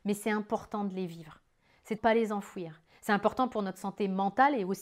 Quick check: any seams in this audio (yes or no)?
yes